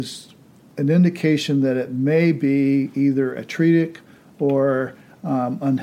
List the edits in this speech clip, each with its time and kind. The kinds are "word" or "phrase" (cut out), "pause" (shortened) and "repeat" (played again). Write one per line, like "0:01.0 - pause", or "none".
none